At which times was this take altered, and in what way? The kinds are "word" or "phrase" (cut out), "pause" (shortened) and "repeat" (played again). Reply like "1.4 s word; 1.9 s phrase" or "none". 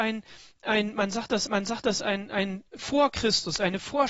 1.5 s repeat; 2.7 s pause

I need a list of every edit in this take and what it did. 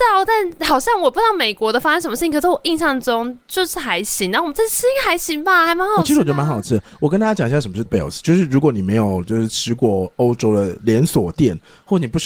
7.9 s word

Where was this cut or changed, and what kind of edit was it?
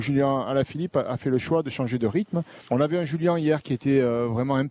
2.7 s pause

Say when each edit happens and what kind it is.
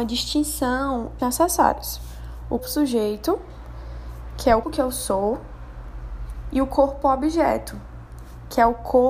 1.2 s phrase; 2.6 s word; 4.6 s word

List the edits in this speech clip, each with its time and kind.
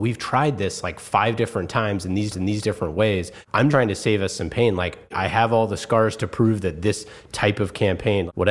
2.3 s repeat; 3.7 s word

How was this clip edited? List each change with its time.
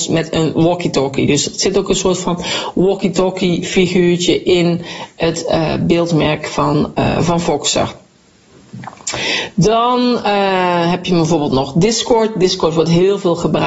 none

